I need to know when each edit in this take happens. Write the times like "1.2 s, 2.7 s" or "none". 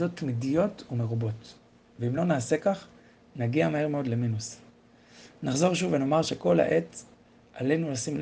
none